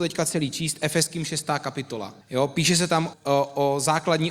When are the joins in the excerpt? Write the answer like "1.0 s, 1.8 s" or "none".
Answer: 2.2 s, 3.1 s